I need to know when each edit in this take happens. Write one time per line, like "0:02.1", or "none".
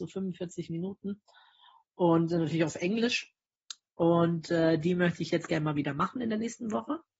none